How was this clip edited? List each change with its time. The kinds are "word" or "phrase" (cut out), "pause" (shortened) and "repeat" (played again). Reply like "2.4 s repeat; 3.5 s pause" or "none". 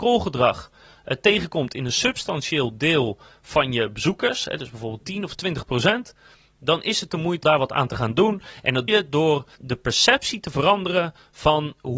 7.4 s word; 8.9 s word; 9.6 s word